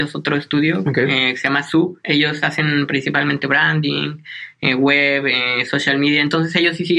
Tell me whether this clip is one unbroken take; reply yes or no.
yes